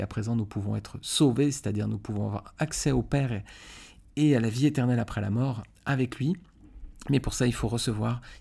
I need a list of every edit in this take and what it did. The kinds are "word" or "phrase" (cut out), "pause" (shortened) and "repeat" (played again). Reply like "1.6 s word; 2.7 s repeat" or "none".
none